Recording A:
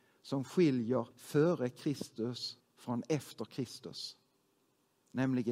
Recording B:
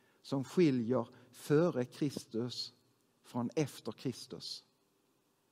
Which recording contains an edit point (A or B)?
A